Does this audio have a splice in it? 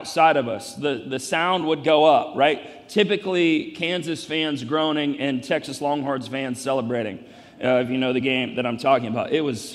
no; 0 cuts

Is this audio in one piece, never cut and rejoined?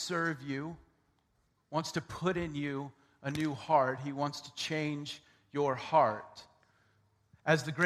yes; 0 cuts

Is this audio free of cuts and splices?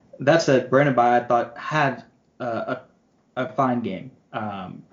yes; 0 cuts

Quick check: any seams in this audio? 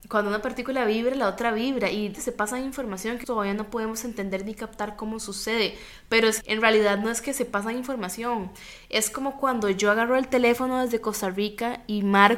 yes; 3 cuts; at 2.1 s, 3.2 s, 6.4 s

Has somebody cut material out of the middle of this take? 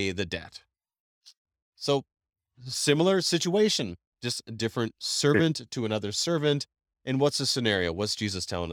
no; 0 cuts

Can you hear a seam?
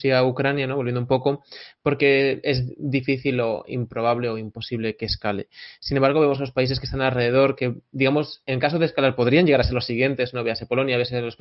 no; 0 cuts

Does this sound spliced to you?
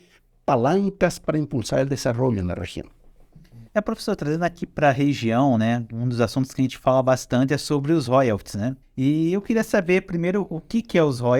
yes; 2 cuts; at 3.7 s, 8.8 s

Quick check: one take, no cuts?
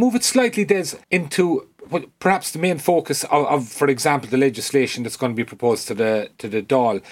no; 1 cut; at 1.0 s

